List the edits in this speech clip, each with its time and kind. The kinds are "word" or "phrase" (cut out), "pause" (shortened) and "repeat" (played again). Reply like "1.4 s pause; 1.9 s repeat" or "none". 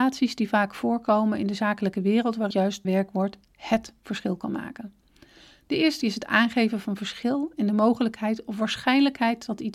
2.5 s word; 2.8 s word; 6.0 s word